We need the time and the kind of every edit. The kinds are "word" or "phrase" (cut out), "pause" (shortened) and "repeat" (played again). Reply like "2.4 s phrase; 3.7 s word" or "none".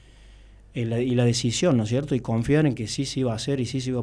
none